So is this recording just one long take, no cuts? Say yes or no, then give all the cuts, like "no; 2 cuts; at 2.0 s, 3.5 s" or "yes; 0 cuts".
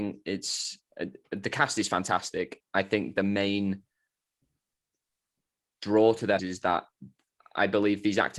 no; 2 cuts; at 2.6 s, 6.4 s